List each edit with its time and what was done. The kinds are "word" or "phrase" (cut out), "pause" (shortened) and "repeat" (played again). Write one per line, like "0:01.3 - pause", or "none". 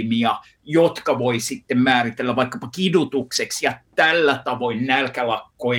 none

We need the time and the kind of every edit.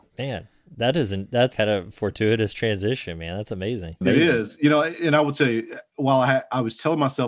0:01.5 - word

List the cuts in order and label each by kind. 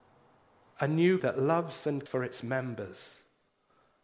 0:01.2 - word
0:02.1 - word

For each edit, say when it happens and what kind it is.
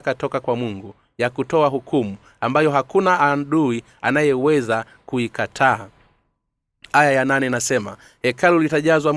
none

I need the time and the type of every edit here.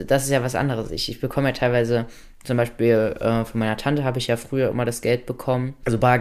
none

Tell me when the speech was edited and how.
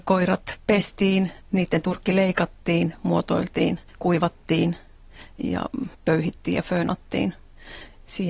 0:01.4 - pause
0:03.9 - pause
0:05.9 - pause

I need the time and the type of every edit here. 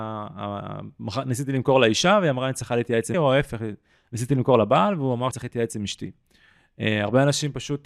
0:03.1 - word
0:05.3 - word

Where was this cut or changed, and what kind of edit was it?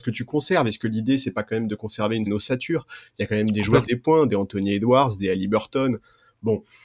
0:02.3 - word
0:03.9 - phrase

